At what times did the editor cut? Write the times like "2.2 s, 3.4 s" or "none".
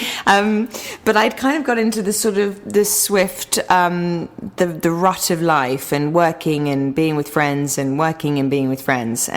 none